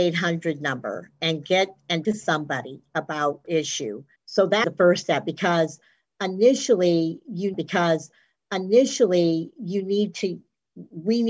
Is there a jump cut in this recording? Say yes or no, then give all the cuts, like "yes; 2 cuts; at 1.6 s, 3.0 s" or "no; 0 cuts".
yes; 5 cuts; at 2.0 s, 3.4 s, 4.2 s, 4.6 s, 7.5 s